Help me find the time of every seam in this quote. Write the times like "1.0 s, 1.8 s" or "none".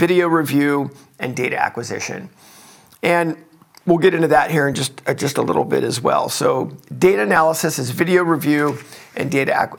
none